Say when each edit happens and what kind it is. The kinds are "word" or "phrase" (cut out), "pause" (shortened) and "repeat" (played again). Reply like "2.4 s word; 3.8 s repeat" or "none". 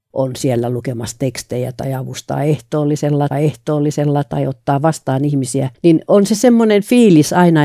3.3 s repeat; 5.7 s pause